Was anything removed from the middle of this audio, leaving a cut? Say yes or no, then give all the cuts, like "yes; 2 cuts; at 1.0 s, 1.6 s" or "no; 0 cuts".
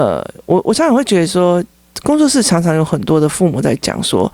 no; 0 cuts